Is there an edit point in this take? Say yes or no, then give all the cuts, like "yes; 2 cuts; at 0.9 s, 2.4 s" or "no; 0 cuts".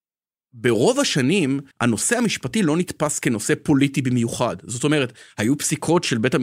yes; 1 cut; at 1.7 s